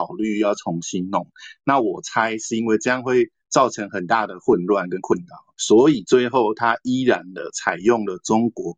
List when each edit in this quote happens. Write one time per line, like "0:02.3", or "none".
0:05.6